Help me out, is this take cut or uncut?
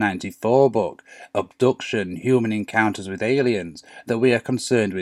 uncut